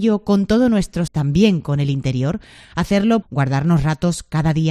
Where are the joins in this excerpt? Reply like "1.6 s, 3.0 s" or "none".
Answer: 1.1 s, 3.2 s